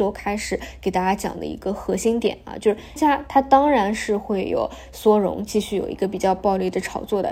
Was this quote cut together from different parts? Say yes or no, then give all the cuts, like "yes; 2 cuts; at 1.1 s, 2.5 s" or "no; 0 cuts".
yes; 1 cut; at 3.0 s